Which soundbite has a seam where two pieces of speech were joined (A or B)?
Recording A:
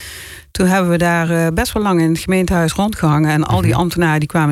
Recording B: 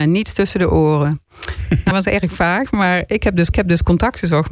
B